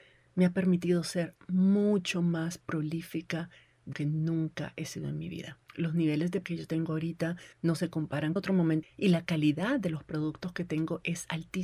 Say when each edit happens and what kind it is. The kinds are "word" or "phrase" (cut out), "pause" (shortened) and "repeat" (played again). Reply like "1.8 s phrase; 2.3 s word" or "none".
3.9 s word; 5.7 s pause; 6.4 s word; 7.5 s pause; 8.4 s phrase; 8.8 s phrase